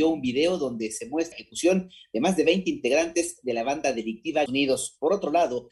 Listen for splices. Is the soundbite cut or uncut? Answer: cut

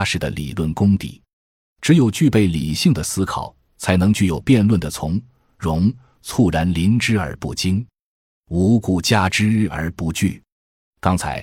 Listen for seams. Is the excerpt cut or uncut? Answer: uncut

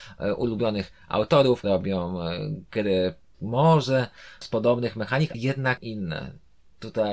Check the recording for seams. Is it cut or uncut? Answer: cut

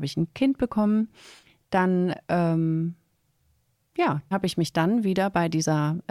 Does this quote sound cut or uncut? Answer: cut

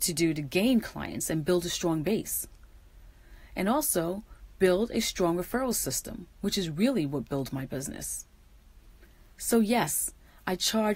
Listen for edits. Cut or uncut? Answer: uncut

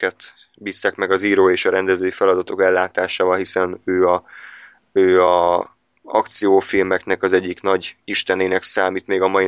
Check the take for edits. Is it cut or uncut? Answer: uncut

